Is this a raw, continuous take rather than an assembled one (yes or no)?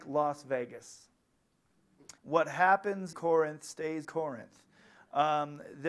no